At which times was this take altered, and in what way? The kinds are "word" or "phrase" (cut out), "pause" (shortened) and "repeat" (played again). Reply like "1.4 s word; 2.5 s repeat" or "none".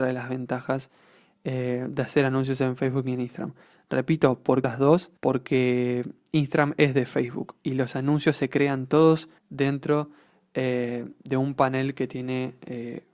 4.6 s phrase; 5.2 s pause; 9.4 s pause